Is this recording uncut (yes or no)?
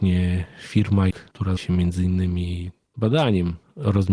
no